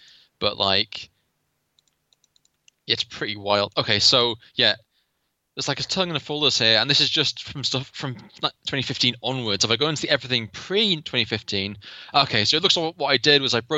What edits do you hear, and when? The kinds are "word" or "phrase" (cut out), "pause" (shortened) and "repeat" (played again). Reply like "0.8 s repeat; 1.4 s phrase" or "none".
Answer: none